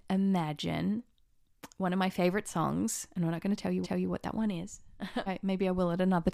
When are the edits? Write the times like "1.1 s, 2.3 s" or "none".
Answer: 3.8 s, 5.3 s